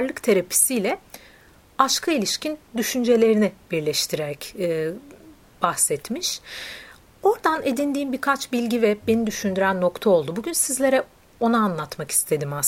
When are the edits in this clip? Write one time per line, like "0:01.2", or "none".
none

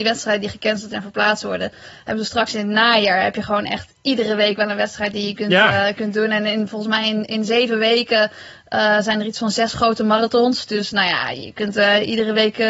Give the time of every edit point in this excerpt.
none

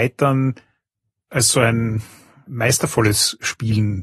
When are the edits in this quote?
none

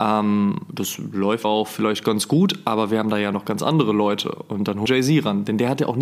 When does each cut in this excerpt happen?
0:01.4
0:04.9

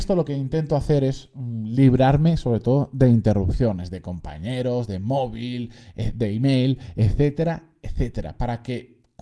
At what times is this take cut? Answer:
none

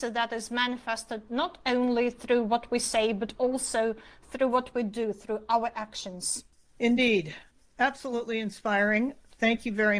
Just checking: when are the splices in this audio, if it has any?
0:07.5

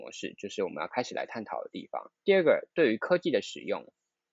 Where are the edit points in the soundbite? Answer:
0:02.1

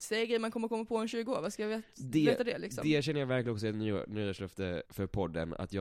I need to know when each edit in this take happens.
0:04.9

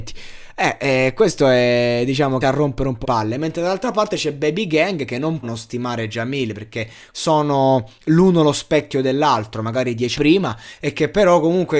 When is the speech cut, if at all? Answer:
0:02.4
0:03.0
0:05.4
0:07.1
0:10.2

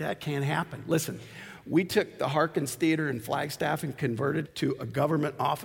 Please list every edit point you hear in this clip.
0:04.4

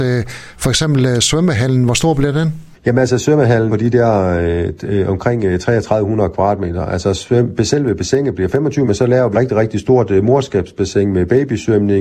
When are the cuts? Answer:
0:02.7
0:03.7
0:08.9
0:09.3

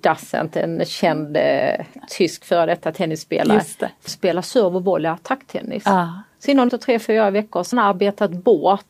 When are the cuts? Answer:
0:04.1
0:06.7
0:07.7

